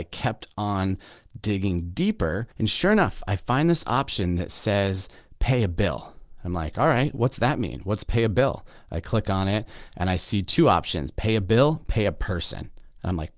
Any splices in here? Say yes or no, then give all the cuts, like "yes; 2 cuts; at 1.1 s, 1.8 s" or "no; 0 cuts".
yes; 1 cut; at 2.5 s